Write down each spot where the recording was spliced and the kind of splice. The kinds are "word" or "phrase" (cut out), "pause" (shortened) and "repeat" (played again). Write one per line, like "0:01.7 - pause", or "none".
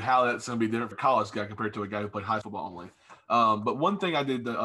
0:00.9 - word
0:02.4 - word